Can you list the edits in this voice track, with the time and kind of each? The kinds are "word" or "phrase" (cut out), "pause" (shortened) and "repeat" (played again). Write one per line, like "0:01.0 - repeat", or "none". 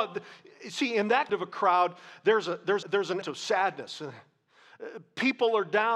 0:01.3 - word
0:02.8 - word
0:03.2 - word